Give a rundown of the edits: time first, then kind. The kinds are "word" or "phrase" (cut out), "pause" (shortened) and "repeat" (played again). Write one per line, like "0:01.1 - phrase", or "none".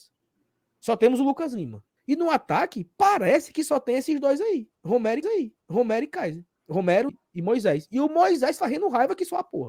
0:02.0 - pause
0:05.2 - repeat
0:07.1 - phrase